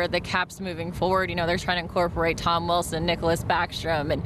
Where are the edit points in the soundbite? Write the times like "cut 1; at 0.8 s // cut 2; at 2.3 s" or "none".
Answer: cut 1; at 1.6 s